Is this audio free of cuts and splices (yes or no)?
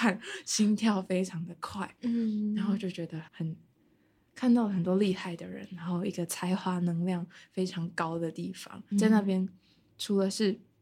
no